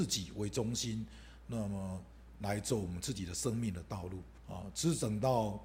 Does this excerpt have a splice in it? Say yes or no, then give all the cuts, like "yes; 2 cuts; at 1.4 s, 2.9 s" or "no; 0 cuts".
yes; 1 cut; at 4.4 s